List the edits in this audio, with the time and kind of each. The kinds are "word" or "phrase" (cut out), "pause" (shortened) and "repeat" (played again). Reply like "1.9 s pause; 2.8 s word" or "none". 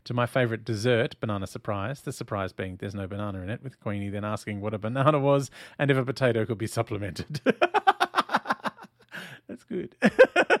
none

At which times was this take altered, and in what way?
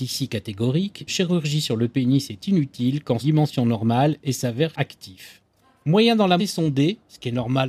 1.1 s word; 3.2 s phrase; 4.7 s word; 5.6 s pause; 6.4 s phrase

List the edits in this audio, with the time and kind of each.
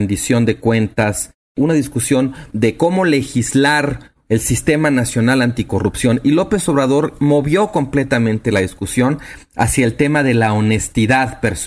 none

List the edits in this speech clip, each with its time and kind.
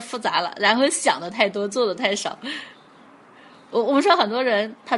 none

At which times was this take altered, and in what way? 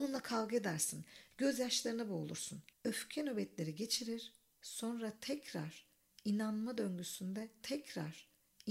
2.7 s pause; 7.6 s repeat

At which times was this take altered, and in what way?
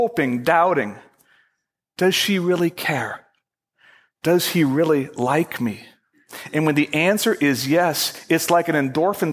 none

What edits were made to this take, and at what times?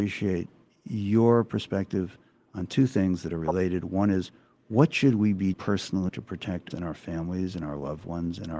5.5 s word; 6.1 s word; 6.7 s word

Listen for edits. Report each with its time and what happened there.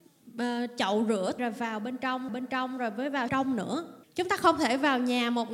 1.4 s word; 2.3 s repeat; 3.3 s phrase; 4.0 s pause

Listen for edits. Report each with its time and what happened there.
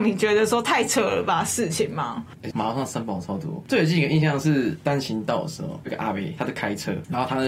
2.5 s phrase

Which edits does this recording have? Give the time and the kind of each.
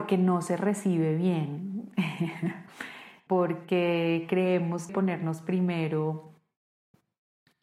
3.3 s word; 4.9 s word

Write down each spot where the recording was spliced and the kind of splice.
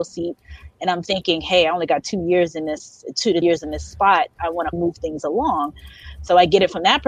3.4 s word; 4.7 s word

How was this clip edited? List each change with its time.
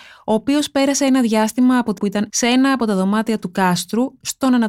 2.0 s word; 2.3 s word

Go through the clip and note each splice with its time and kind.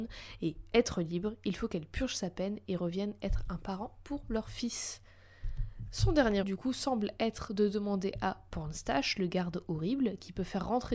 6.4 s word

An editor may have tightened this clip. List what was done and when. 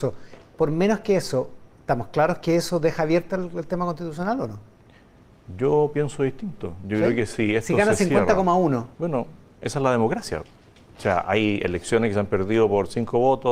8.9 s pause

